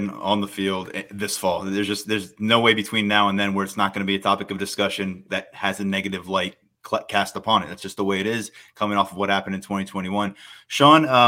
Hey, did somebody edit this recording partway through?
no; 0 cuts

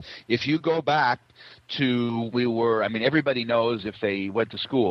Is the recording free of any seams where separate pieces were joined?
no; 1 cut; at 2.3 s

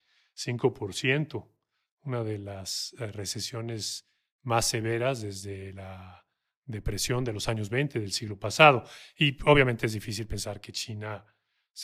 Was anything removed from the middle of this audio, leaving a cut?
no; 0 cuts

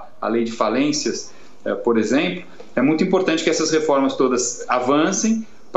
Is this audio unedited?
yes; 0 cuts

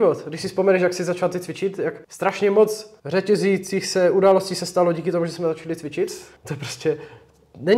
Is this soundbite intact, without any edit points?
no; 3 cuts; at 2.0 s, 3.0 s, 6.4 s

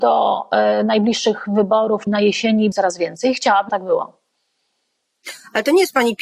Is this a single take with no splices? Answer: no; 3 cuts; at 2.1 s, 2.7 s, 3.7 s

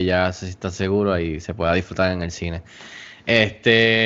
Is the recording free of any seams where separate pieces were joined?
yes; 0 cuts

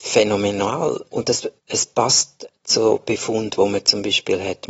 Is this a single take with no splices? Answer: no; 2 cuts; at 1.1 s, 1.6 s

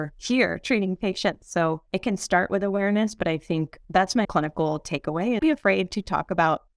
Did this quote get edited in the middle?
yes; 4 cuts; at 1.9 s, 3.8 s, 4.2 s, 5.4 s

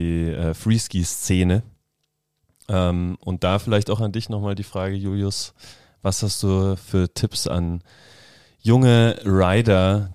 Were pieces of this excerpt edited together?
no; 0 cuts

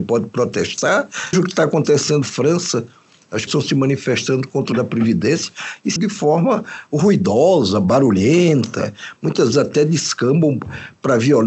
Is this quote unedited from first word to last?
no; 6 cuts; at 1.3 s, 2.2 s, 3.5 s, 4.7 s, 6.0 s, 9.5 s

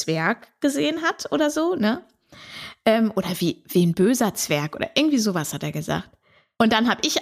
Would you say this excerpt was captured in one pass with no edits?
yes; 0 cuts

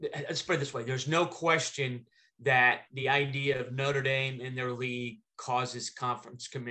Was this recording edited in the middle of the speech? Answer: no; 0 cuts

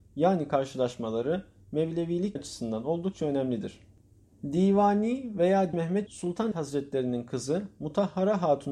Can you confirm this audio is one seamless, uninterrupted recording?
no; 4 cuts; at 2.4 s, 5.7 s, 6.1 s, 6.5 s

